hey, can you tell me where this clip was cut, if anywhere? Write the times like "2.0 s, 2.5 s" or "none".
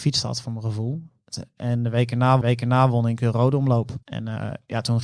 2.4 s, 4.0 s